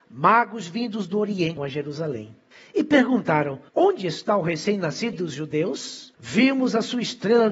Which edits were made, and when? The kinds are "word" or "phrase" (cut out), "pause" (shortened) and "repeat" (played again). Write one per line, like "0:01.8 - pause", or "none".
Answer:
0:01.6 - word
0:02.5 - pause
0:03.7 - pause
0:05.1 - word
0:06.1 - pause